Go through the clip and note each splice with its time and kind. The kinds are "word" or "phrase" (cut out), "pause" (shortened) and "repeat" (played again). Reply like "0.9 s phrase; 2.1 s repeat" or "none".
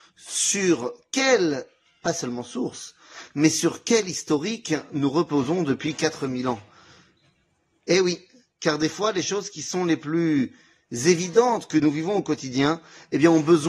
none